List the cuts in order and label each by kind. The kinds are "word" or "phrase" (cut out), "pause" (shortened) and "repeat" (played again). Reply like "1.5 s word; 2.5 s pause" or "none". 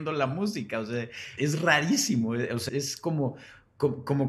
1.4 s word; 2.7 s word